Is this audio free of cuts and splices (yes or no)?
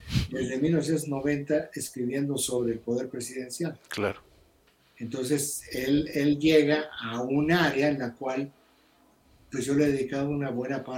yes